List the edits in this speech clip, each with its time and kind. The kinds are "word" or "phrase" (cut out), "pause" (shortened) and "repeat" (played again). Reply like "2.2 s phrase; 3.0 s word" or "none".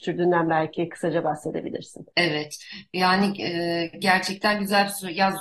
none